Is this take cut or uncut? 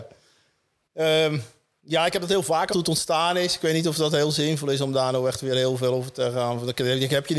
cut